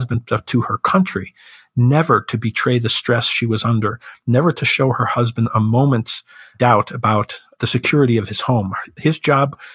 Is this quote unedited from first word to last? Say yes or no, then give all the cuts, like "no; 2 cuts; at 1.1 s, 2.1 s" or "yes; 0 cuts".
yes; 0 cuts